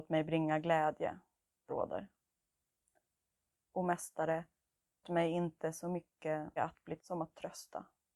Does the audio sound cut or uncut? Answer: cut